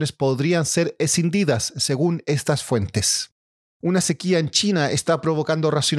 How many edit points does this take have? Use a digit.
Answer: 0